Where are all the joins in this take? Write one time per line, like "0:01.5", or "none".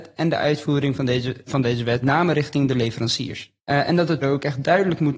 0:01.5
0:02.0
0:03.6
0:04.2